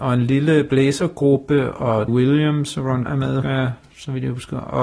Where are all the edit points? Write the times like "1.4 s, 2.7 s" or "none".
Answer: 2.1 s, 3.1 s, 3.4 s